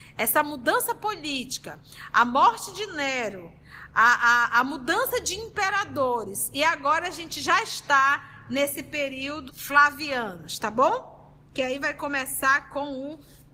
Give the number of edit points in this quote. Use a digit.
1